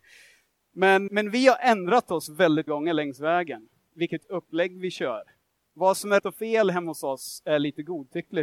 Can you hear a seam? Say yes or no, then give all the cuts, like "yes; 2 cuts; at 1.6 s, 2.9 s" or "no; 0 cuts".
yes; 3 cuts; at 1.1 s, 2.7 s, 6.2 s